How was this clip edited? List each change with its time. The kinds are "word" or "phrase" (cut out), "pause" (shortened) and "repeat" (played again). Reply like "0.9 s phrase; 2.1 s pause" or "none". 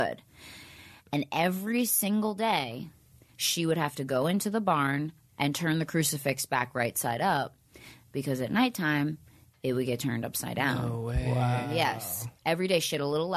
none